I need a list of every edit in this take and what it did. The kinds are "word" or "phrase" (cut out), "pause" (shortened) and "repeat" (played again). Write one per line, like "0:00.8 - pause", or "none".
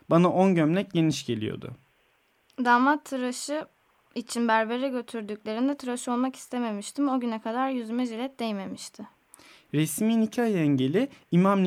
none

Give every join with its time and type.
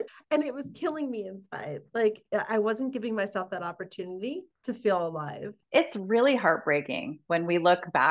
0:04.5 - pause
0:05.6 - pause

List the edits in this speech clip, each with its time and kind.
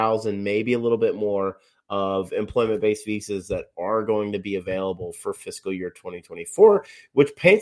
none

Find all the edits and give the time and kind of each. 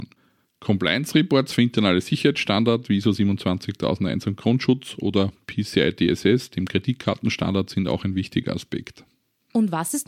none

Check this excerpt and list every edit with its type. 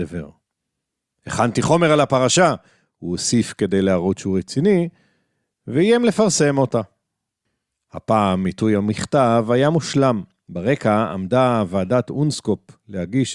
none

